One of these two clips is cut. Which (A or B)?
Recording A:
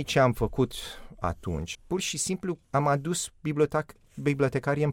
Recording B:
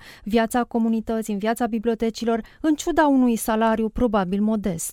A